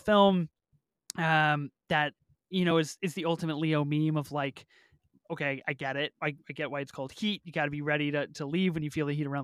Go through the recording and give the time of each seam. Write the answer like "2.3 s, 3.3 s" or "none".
none